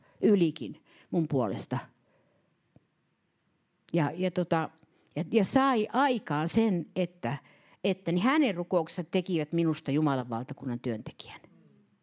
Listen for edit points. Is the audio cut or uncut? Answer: uncut